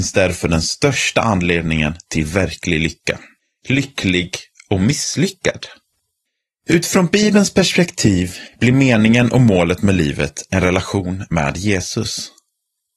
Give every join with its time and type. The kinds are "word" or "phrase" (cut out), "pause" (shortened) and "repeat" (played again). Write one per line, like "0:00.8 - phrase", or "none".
0:03.4 - pause
0:06.3 - pause